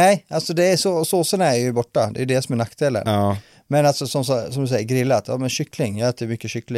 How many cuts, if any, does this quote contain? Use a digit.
0